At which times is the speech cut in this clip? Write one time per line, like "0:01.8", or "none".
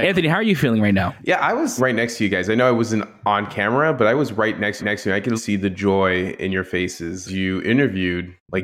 0:01.8
0:04.8
0:05.4
0:07.3